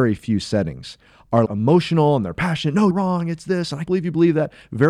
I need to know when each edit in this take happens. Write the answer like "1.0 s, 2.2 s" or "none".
1.5 s, 2.9 s, 3.9 s